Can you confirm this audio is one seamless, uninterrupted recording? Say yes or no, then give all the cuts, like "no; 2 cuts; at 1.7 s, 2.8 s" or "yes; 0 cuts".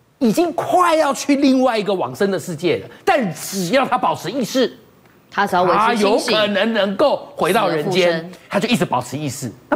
no; 1 cut; at 8.5 s